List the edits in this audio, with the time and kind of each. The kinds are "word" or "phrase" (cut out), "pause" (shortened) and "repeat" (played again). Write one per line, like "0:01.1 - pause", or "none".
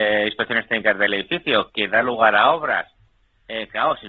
none